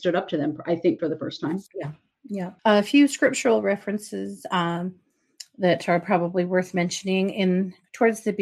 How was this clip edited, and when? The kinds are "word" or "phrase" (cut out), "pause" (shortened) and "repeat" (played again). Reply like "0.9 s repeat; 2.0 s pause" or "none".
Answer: 1.0 s word; 1.7 s pause; 2.6 s pause